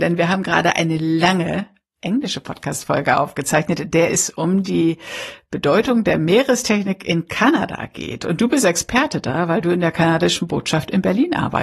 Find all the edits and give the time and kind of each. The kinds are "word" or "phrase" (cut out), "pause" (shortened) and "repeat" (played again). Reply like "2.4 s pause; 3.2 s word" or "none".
none

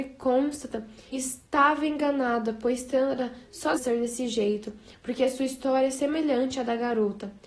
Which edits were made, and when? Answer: 1.1 s word; 3.8 s word

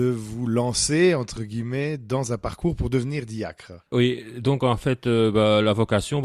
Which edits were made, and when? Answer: 3.9 s pause

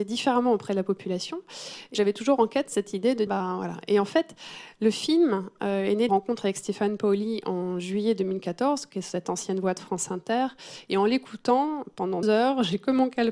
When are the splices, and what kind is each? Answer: 1.9 s word; 3.3 s word; 6.1 s word; 12.2 s word

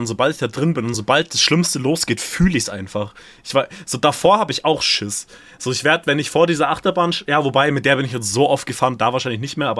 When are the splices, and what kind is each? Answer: none

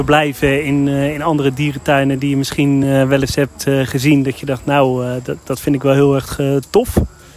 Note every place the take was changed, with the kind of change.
none

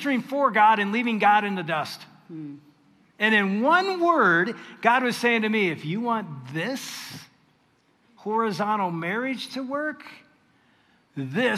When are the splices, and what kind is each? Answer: none

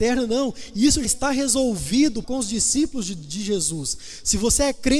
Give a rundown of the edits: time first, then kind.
1.0 s word; 2.2 s word

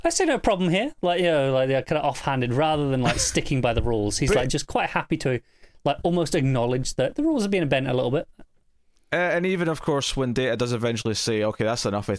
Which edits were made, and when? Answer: none

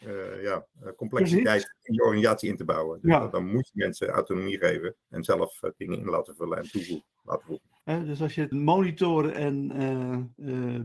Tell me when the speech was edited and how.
5.0 s pause; 7.8 s pause; 8.5 s word

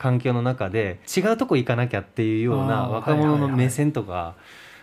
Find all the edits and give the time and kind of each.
1.1 s pause

